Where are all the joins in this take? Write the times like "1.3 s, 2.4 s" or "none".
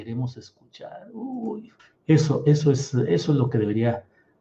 1.8 s